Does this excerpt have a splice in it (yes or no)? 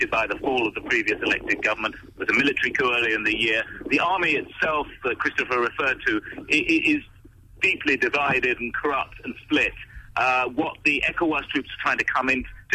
no